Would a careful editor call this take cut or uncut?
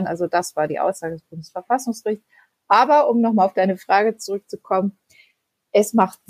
uncut